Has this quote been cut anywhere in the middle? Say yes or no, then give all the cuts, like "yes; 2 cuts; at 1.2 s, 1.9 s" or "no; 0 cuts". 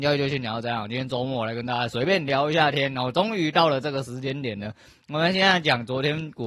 no; 0 cuts